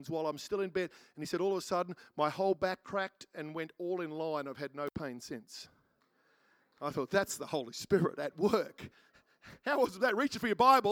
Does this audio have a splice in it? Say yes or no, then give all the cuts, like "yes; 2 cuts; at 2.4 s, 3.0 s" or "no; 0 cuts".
yes; 1 cut; at 2.8 s